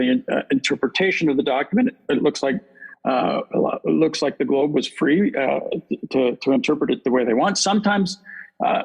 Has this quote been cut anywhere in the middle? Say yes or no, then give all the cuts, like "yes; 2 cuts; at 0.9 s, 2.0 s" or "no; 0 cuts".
yes; 1 cut; at 2.0 s